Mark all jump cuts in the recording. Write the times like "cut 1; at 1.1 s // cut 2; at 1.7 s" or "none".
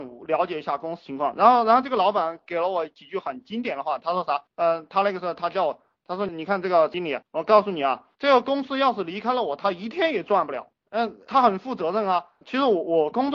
cut 1; at 8.1 s